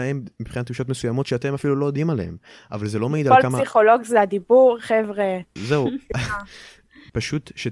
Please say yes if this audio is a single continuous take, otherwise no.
yes